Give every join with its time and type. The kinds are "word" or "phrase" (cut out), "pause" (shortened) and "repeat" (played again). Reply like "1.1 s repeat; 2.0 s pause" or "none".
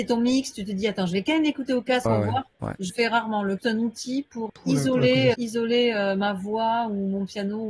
2.1 s phrase; 2.5 s pause; 2.9 s word; 3.6 s phrase; 4.5 s word; 5.3 s word